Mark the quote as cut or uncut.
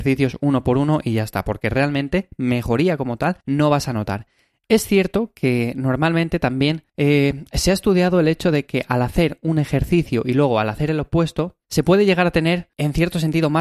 cut